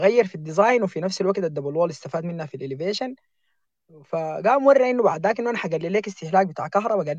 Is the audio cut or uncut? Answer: uncut